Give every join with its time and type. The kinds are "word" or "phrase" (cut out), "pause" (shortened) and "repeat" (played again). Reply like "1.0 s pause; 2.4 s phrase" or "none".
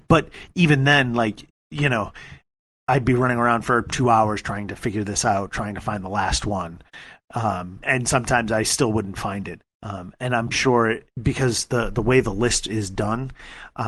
7.8 s word; 9.7 s pause; 10.5 s word

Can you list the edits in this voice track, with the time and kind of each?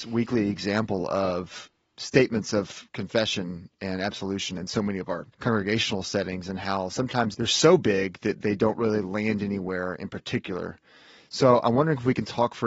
5.3 s pause

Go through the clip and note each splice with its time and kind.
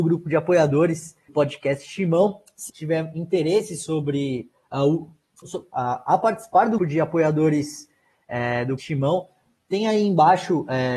1.3 s word; 2.7 s word; 5.4 s word; 6.8 s word; 8.8 s word

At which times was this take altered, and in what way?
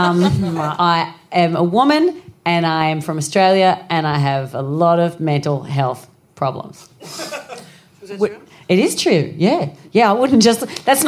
none

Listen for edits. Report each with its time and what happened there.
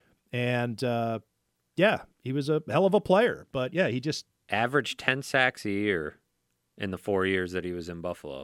none

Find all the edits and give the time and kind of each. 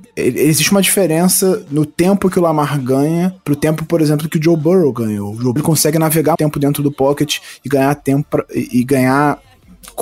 5.6 s word; 6.3 s word

